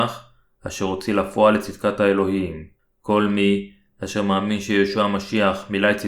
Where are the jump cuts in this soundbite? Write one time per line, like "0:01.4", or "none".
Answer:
none